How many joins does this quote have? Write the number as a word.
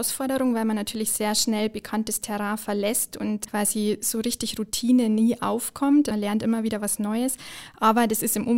zero